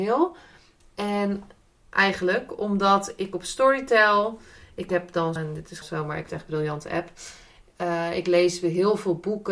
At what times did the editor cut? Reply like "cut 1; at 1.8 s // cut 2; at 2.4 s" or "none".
cut 1; at 1.8 s // cut 2; at 5.4 s // cut 3; at 5.8 s // cut 4; at 6.3 s